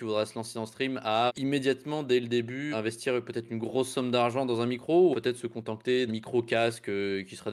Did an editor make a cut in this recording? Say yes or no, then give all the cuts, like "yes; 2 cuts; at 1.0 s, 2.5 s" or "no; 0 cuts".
yes; 4 cuts; at 1.3 s, 2.7 s, 5.1 s, 6.1 s